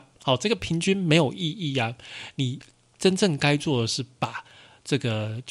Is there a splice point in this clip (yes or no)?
no